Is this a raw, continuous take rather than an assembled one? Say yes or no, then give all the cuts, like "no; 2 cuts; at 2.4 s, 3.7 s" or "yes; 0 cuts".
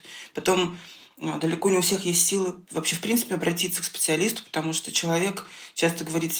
yes; 0 cuts